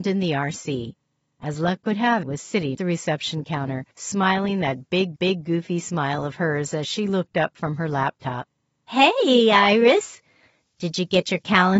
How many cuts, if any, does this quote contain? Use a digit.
4